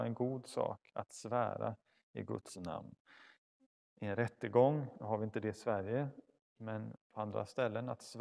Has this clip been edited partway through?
no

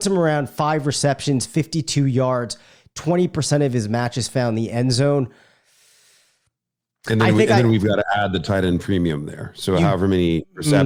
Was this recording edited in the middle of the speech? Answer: no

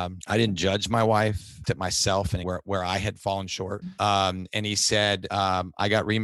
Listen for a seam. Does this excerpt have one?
yes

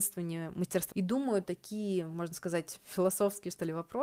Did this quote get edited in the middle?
yes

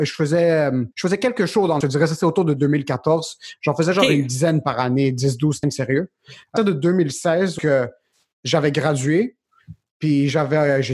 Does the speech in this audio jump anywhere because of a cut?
yes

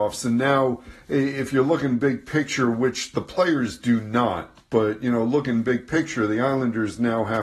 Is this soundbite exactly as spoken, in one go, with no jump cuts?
yes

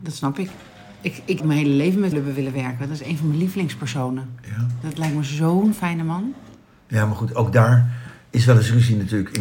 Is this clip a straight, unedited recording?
no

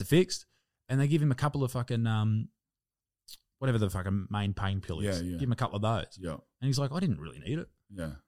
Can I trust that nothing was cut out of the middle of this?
yes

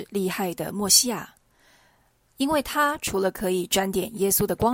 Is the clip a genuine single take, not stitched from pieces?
yes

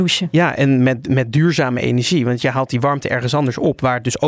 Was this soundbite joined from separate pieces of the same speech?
no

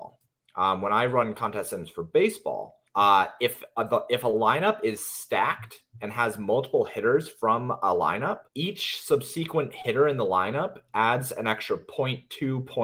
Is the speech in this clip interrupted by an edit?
yes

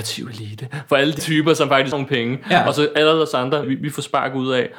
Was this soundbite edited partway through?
yes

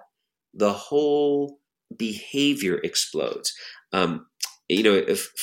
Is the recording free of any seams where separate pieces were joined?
no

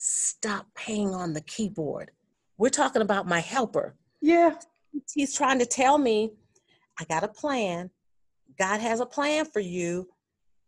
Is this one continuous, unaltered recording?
yes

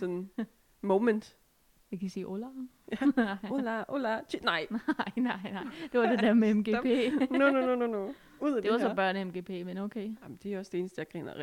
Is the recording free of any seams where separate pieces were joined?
yes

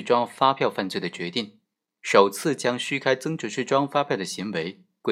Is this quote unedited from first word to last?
yes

